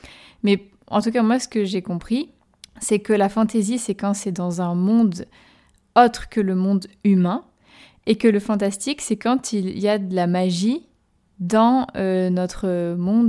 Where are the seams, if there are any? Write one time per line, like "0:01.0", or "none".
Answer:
0:02.4